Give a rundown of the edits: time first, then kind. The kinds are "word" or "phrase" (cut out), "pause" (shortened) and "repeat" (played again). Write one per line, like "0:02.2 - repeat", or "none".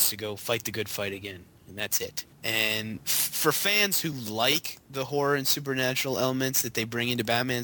none